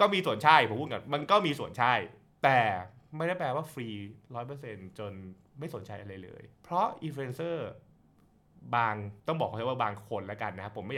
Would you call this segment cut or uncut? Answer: cut